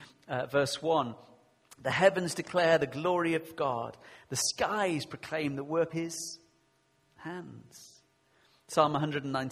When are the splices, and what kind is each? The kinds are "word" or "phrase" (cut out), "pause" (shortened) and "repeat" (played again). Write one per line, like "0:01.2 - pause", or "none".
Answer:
0:05.9 - word